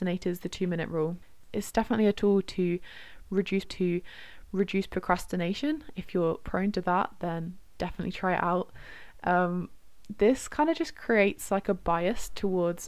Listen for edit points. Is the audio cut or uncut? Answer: cut